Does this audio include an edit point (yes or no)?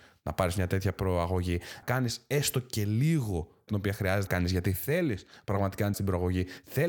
yes